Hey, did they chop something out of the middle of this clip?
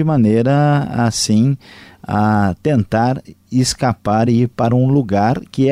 no; 0 cuts

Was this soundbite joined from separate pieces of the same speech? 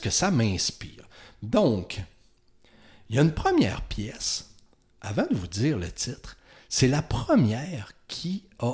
no; 0 cuts

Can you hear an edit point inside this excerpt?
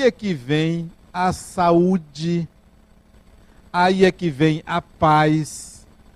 no; 0 cuts

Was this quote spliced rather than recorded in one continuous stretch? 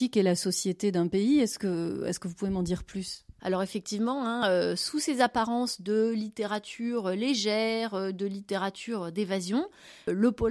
no; 0 cuts

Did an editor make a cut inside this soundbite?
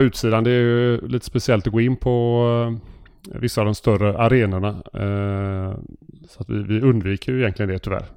no; 0 cuts

